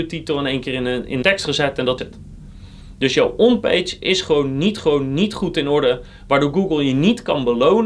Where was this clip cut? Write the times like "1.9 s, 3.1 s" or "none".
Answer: 1.2 s, 2.0 s, 4.8 s